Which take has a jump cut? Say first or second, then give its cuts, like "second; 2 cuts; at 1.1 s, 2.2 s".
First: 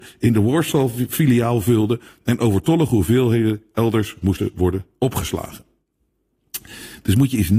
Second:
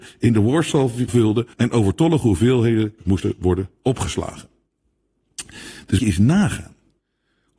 second; 4 cuts; at 1.1 s, 1.5 s, 3.0 s, 6.0 s